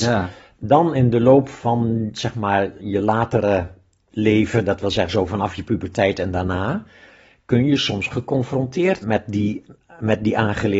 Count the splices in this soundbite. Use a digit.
1